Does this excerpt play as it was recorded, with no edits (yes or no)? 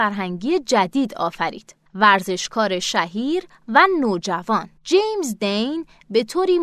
no